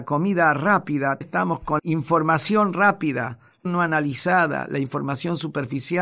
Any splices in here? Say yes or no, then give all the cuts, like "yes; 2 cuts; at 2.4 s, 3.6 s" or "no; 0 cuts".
yes; 3 cuts; at 1.2 s, 1.8 s, 3.6 s